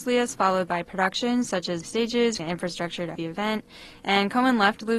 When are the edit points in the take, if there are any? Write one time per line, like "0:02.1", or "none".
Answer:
0:01.8
0:02.4
0:03.2